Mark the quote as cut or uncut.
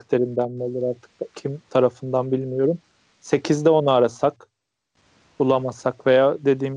uncut